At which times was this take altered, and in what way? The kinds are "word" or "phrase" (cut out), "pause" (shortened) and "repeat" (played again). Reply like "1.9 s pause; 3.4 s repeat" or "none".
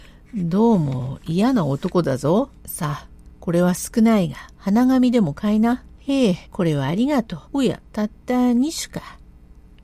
2.6 s pause; 4.5 s pause; 5.9 s pause; 6.4 s pause; 7.4 s pause; 7.9 s pause